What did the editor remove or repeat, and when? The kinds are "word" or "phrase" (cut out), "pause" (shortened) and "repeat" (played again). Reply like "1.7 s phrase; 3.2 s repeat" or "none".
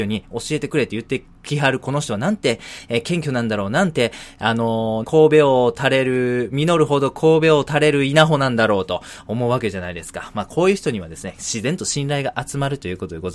5.0 s word

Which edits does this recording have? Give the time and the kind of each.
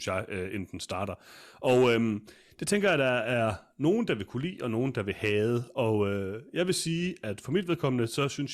none

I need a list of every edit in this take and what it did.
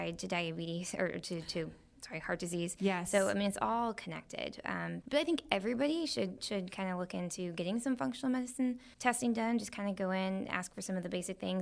5.0 s word; 8.9 s pause

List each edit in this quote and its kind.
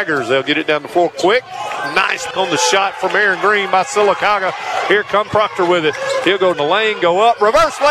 2.3 s word; 5.3 s word; 6.5 s word

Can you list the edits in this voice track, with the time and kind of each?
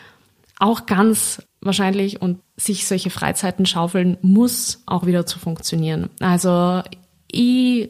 1.5 s word; 2.4 s word; 4.9 s word

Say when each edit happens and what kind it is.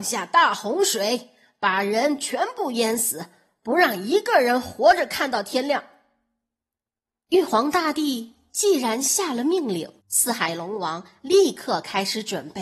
10.0 s pause

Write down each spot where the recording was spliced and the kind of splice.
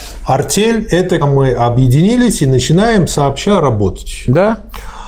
1.2 s word

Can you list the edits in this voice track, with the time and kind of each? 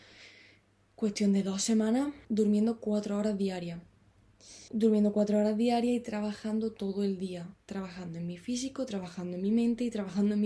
2.2 s pause; 4.7 s pause

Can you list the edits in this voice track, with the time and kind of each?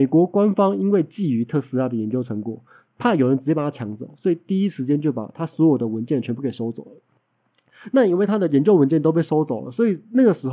none

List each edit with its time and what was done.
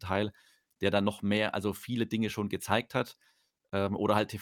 none

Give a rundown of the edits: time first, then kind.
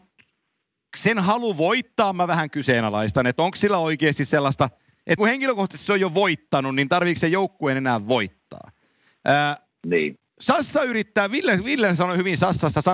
5.2 s phrase; 10.3 s pause

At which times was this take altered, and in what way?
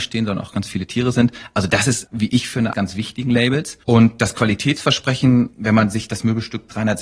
2.7 s phrase; 3.8 s pause

